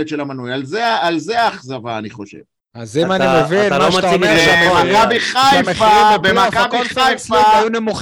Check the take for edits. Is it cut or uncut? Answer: uncut